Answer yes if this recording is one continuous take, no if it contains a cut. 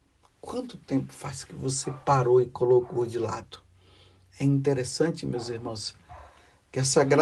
yes